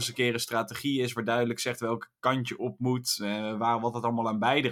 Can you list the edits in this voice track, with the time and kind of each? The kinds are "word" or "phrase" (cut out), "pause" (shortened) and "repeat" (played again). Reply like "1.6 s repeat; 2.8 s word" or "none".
none